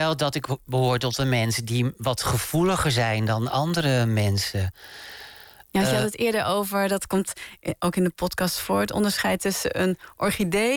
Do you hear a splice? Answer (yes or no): no